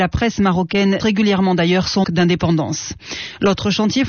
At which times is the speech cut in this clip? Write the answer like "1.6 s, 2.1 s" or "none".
1.0 s, 2.0 s